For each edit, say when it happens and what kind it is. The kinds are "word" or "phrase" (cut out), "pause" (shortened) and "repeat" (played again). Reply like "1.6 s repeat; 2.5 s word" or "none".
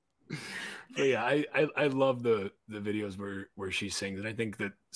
2.6 s pause